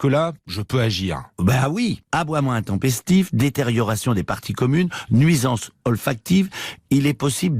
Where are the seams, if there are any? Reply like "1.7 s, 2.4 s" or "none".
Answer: none